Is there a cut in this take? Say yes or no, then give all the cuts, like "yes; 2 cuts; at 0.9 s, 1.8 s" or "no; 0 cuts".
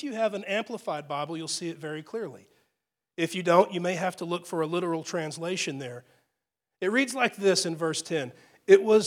no; 0 cuts